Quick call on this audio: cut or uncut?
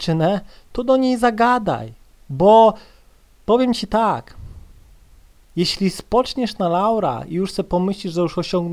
uncut